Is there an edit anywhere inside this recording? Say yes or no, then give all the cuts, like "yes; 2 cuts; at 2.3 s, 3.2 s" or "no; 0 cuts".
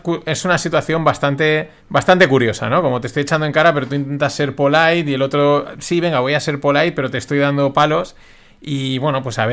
yes; 1 cut; at 1.8 s